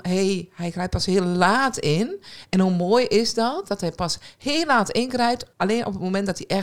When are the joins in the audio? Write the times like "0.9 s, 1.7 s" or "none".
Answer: 5.5 s

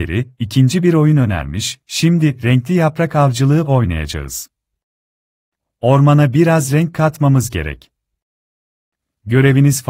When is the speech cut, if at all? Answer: none

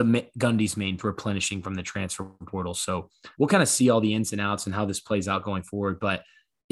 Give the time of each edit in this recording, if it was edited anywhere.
1.0 s, 2.4 s, 3.3 s

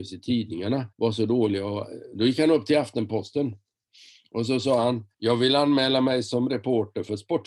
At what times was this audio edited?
0.9 s, 5.1 s

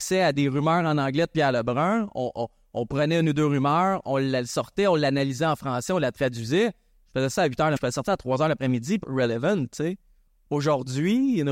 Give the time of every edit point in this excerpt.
7.8 s, 9.0 s

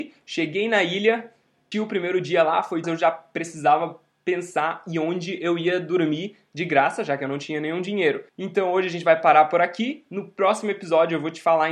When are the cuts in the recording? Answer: 1.7 s, 2.8 s, 8.3 s

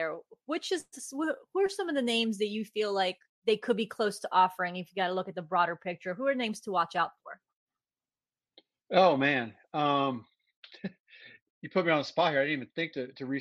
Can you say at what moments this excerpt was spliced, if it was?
none

